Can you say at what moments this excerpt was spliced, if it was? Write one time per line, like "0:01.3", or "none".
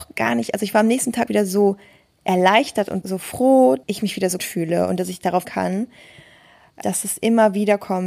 0:01.3
0:03.0
0:03.8
0:04.4
0:05.4
0:06.8